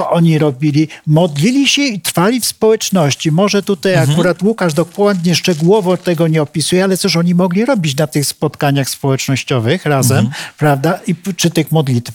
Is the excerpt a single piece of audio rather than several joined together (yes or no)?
yes